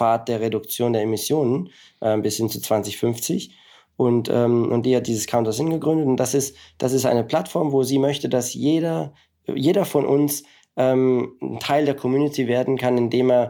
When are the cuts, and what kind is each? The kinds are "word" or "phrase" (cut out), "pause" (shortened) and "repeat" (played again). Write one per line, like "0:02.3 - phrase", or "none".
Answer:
none